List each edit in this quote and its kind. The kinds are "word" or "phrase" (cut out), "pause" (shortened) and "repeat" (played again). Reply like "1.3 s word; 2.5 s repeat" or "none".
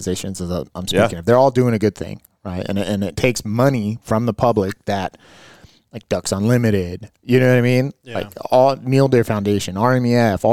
none